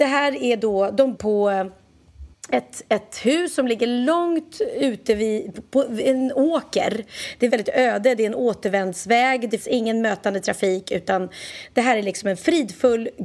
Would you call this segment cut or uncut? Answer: cut